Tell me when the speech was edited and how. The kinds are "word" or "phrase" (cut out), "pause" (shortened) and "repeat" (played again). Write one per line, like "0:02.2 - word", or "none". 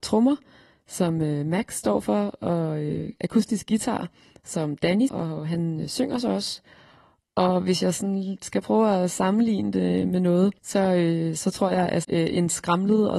0:05.1 - word
0:10.6 - pause
0:12.0 - word